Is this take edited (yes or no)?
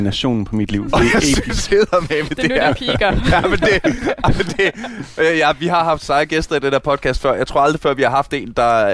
no